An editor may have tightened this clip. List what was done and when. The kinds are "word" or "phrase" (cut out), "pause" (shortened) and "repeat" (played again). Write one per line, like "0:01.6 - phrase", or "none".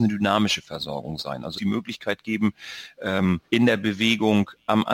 0:01.5 - phrase
0:03.4 - pause